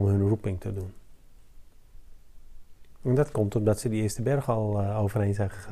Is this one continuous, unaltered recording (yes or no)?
yes